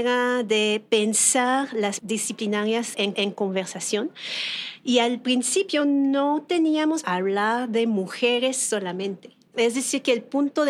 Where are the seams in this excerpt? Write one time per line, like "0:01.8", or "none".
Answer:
0:02.0
0:03.1
0:07.0